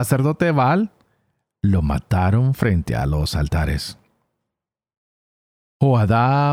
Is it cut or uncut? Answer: uncut